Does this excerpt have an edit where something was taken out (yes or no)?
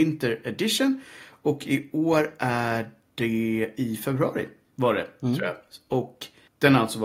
no